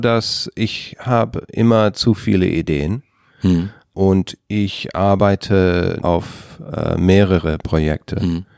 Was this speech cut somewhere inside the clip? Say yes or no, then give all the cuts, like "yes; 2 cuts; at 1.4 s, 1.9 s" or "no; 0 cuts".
yes; 1 cut; at 6.0 s